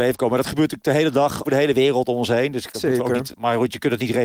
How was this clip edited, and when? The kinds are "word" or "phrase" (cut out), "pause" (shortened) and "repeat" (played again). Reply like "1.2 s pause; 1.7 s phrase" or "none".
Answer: 1.4 s word; 2.7 s word; 3.3 s word